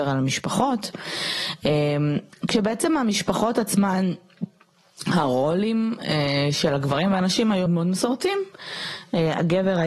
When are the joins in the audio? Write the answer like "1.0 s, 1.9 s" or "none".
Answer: 7.7 s